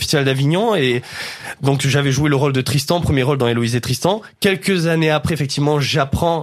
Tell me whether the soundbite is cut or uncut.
uncut